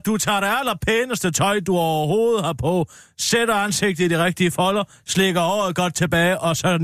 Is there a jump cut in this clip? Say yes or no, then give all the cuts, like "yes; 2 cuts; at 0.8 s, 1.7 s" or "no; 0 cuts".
no; 0 cuts